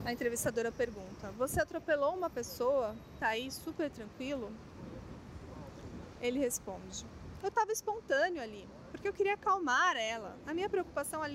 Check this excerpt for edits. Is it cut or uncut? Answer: cut